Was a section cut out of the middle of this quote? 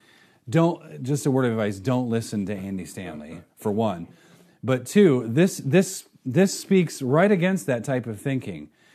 no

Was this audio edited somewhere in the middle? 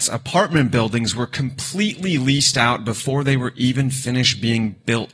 no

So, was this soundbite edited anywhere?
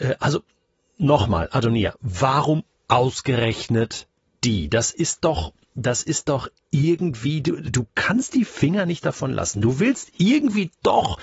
no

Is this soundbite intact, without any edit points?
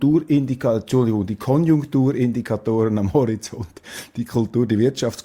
yes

